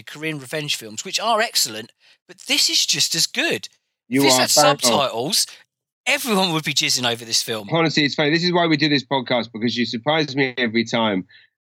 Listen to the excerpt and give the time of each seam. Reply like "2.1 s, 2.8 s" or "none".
none